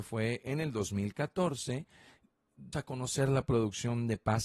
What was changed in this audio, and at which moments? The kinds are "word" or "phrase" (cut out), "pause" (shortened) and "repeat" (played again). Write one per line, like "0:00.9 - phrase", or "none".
0:02.7 - word